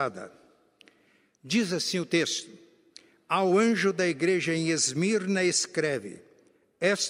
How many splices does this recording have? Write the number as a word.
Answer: zero